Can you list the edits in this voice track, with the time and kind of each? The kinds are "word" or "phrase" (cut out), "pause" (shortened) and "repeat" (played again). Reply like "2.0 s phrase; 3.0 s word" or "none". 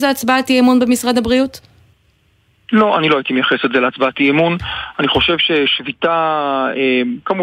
2.4 s pause